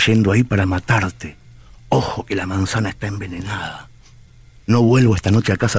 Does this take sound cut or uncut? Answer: uncut